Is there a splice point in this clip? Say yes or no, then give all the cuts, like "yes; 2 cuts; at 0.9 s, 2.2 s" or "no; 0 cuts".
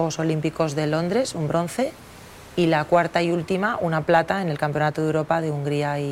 no; 0 cuts